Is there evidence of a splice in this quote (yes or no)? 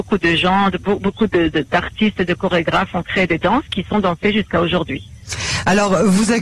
no